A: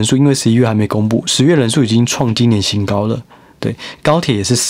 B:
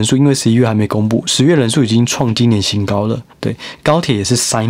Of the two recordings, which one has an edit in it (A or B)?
B